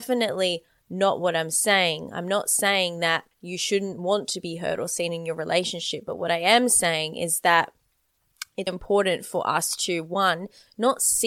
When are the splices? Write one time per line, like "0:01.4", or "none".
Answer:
0:03.3
0:08.7